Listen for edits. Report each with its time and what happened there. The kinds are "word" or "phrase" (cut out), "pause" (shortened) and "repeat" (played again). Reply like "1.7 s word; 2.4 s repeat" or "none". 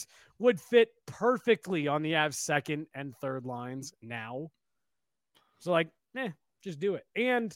none